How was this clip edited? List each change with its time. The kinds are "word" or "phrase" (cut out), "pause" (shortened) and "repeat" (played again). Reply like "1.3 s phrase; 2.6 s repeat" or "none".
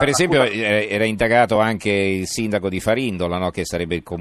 none

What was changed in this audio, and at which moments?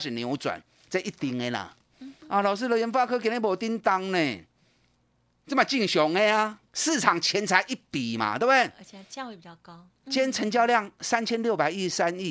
6.7 s pause

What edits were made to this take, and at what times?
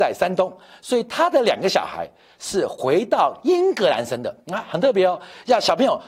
4.4 s pause

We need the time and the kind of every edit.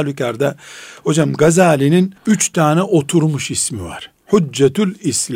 2.2 s pause

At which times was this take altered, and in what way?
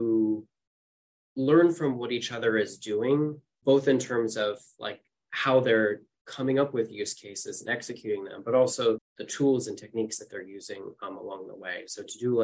3.6 s word; 9.0 s word

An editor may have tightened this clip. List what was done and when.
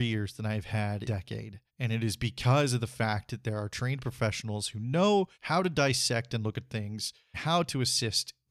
1.0 s phrase; 1.7 s pause; 5.3 s pause; 7.3 s word

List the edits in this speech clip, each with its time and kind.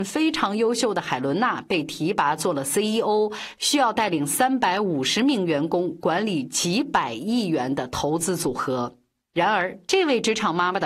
none

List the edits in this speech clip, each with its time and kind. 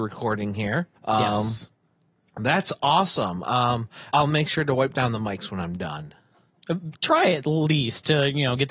1.0 s pause; 4.1 s word

